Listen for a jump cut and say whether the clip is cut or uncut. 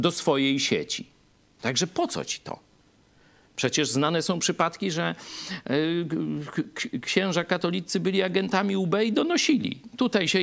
uncut